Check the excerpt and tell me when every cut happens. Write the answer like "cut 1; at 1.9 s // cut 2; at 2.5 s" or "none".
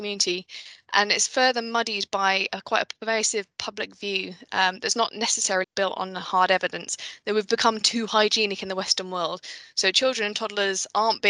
cut 1; at 5.6 s

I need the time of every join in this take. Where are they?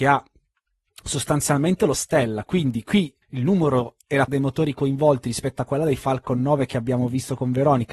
cut 1; at 1.9 s // cut 2; at 3.2 s // cut 3; at 4.3 s

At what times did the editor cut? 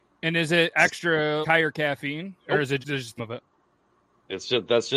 cut 1; at 1.4 s // cut 2; at 2.4 s // cut 3; at 2.8 s // cut 4; at 3.2 s

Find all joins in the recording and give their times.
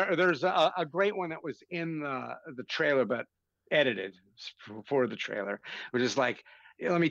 none

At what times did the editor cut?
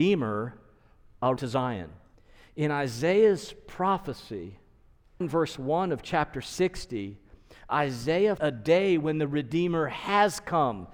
cut 1; at 1.4 s // cut 2; at 2.1 s // cut 3; at 5.2 s // cut 4; at 8.4 s

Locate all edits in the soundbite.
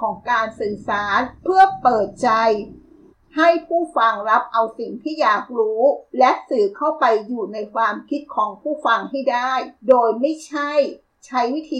cut 1; at 1.4 s // cut 2; at 3.1 s // cut 3; at 6.1 s // cut 4; at 9.8 s

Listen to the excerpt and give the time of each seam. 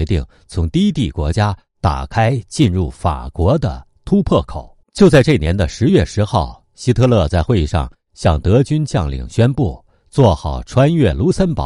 cut 1; at 4.8 s

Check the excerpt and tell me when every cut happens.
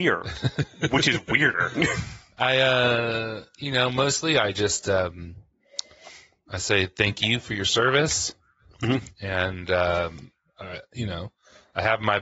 none

